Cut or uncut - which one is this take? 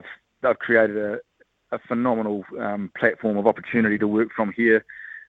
uncut